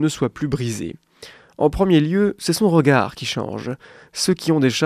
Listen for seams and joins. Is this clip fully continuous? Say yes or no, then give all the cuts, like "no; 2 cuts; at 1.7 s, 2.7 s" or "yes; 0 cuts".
yes; 0 cuts